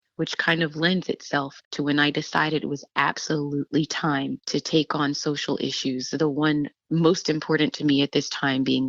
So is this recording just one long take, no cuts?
yes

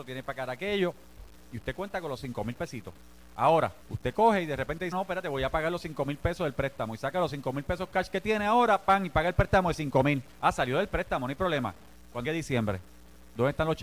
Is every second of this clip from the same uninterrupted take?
no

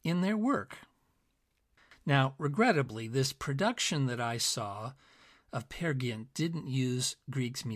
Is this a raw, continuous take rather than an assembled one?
yes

